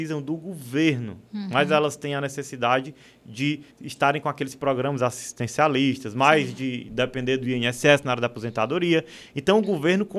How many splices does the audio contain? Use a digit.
2